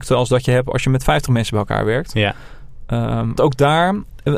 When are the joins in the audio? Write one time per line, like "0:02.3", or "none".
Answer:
0:03.4